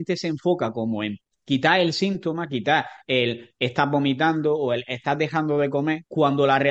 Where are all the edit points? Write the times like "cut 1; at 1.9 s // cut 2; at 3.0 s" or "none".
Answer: none